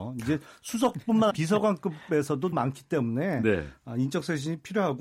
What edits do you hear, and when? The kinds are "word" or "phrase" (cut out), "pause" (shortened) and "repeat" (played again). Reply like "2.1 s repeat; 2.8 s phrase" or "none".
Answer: 1.3 s word; 2.5 s word